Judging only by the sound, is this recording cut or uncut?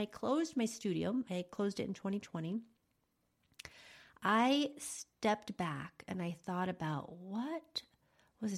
uncut